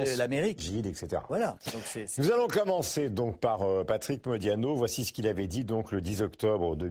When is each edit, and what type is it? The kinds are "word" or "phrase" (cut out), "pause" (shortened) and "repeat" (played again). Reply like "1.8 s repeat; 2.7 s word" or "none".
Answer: none